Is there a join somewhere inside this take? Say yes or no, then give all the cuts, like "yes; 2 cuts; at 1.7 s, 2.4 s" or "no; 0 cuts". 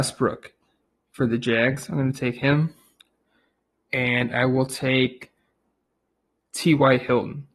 no; 0 cuts